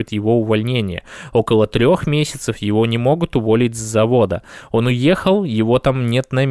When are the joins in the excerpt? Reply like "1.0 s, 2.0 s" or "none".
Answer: none